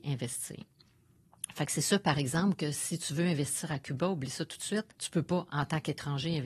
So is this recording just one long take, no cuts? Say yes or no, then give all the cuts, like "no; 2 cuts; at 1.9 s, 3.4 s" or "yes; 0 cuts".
no; 1 cut; at 4.9 s